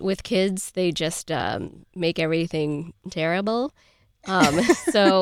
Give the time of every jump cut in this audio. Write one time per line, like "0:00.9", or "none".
0:01.9
0:03.0